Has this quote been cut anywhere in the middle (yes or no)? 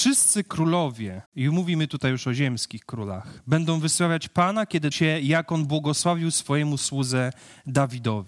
yes